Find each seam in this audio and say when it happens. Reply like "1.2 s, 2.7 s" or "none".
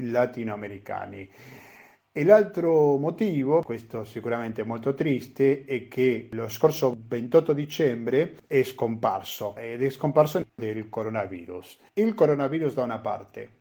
11.9 s